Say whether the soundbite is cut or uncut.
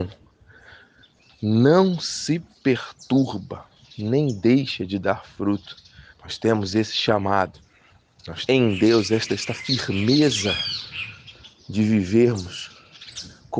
cut